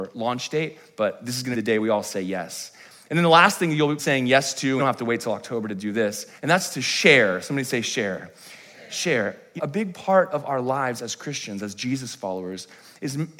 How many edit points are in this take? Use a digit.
5